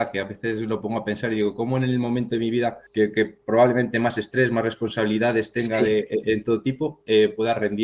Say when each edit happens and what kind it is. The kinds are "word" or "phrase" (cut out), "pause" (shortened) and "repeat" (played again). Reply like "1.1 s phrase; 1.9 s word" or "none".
2.9 s pause